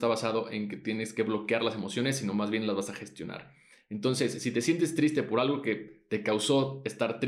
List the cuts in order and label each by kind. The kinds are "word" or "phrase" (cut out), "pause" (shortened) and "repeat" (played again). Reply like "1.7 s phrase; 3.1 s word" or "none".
none